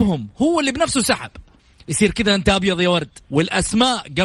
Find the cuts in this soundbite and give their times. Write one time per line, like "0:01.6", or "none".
0:01.6
0:03.2